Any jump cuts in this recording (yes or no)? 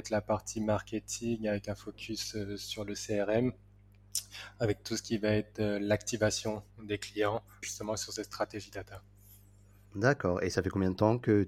yes